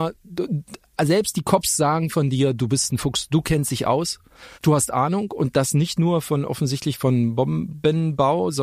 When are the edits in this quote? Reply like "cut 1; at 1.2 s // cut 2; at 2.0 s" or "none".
cut 1; at 4.5 s